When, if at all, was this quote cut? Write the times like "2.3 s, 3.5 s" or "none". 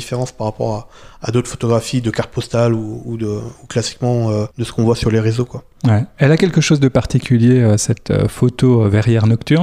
4.5 s